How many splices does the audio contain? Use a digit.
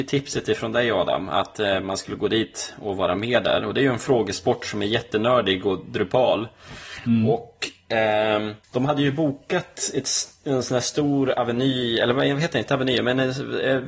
1